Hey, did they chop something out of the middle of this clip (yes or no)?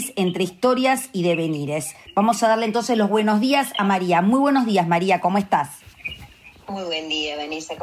no